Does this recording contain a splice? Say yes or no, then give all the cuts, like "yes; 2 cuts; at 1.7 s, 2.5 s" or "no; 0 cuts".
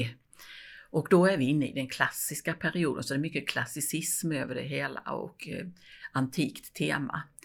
no; 0 cuts